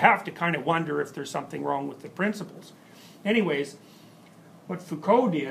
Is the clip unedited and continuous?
yes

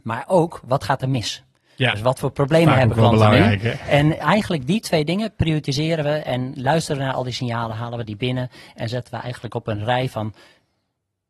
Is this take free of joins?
yes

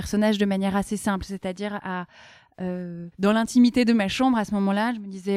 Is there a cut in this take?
yes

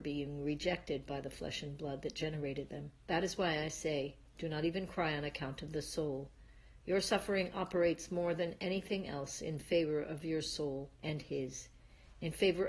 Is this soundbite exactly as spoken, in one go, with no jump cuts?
no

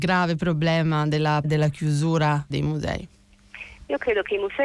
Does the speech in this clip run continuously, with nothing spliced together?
no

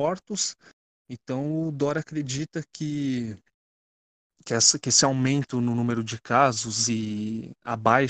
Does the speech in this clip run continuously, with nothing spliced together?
yes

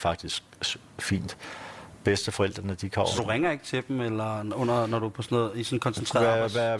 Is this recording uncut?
no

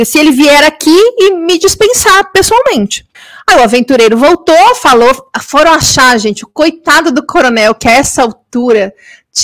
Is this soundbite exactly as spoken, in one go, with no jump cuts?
no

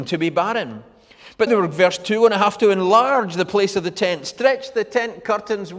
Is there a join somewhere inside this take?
yes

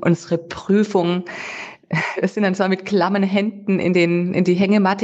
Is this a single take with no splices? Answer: yes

